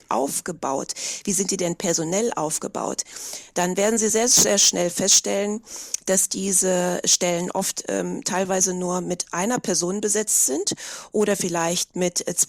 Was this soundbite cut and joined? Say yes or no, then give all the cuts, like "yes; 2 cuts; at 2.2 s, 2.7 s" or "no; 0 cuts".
no; 0 cuts